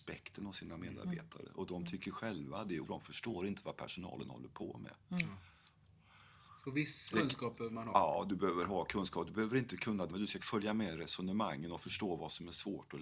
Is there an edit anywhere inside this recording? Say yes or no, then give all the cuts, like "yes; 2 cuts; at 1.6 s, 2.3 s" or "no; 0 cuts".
yes; 4 cuts; at 2.8 s, 7.1 s, 10.1 s, 10.4 s